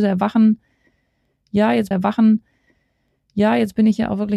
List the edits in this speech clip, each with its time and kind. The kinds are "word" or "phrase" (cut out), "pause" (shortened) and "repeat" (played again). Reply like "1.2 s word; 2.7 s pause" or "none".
1.9 s repeat

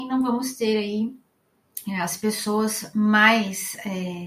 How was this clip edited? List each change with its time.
none

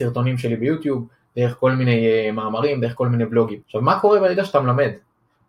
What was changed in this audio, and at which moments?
3.6 s pause

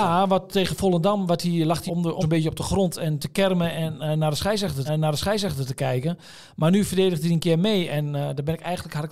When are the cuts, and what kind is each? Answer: 1.9 s word; 2.2 s phrase; 3.2 s word; 4.9 s repeat

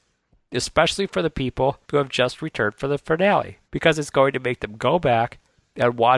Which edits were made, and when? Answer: 1.8 s pause; 3.6 s pause

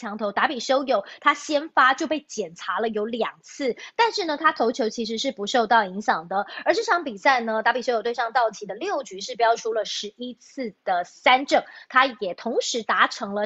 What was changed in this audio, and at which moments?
none

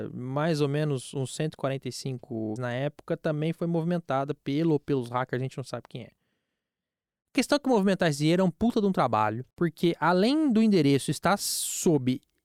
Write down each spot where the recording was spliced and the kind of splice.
2.6 s phrase; 9.5 s pause

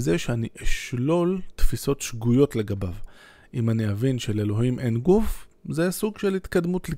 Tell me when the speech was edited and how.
none

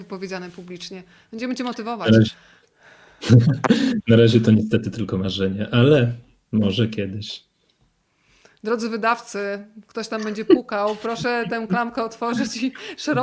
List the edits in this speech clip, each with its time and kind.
none

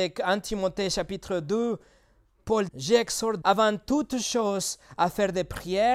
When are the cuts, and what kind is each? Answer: 2.7 s word; 3.4 s word

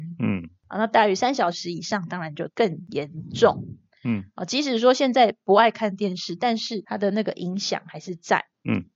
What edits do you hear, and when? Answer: none

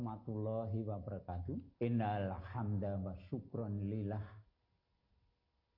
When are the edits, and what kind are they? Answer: 1.7 s pause

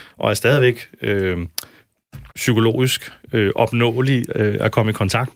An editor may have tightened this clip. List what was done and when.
2.3 s pause

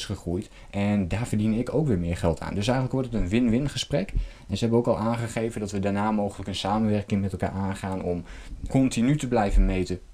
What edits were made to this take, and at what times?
8.7 s word

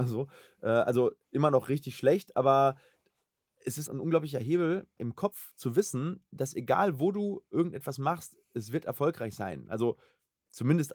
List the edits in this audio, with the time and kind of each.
1.2 s pause; 3.9 s word; 5.0 s word

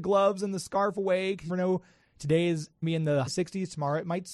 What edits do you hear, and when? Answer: 1.5 s word; 2.8 s word; 3.3 s word

